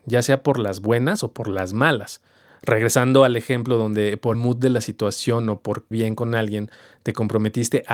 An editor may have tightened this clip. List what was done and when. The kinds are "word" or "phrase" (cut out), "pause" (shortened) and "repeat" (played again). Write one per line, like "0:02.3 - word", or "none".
0:04.3 - word
0:05.9 - word